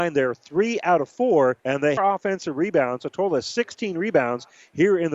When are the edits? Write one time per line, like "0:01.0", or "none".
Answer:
0:01.6
0:02.0